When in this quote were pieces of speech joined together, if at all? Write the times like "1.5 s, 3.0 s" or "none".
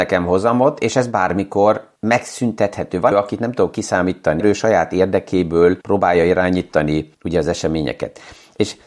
2.0 s, 3.1 s, 4.4 s, 5.8 s, 7.1 s